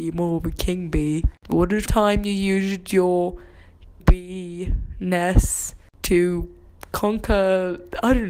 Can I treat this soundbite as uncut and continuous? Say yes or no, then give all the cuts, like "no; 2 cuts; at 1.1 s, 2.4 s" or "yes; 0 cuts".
no; 2 cuts; at 1.9 s, 4.0 s